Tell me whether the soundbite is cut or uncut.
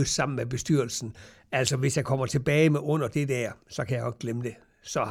uncut